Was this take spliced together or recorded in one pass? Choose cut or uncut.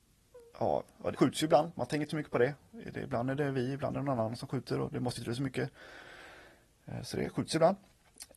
cut